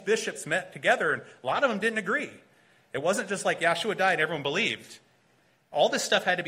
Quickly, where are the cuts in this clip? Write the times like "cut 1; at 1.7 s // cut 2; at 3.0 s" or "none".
none